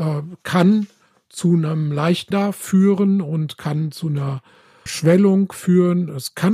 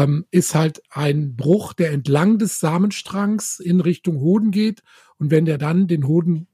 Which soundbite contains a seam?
first; 2 cuts; at 2.3 s, 4.9 s

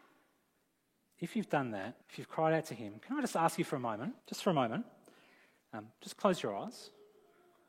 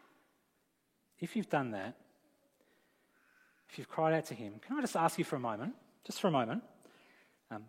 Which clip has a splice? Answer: first; 2 cuts; at 2.0 s, 4.2 s

